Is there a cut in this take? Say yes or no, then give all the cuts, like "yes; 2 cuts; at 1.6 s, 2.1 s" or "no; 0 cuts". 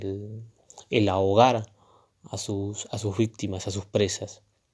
no; 0 cuts